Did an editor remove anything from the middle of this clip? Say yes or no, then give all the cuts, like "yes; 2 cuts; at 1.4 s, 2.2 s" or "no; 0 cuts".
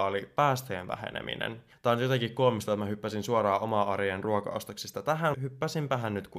yes; 1 cut; at 5.3 s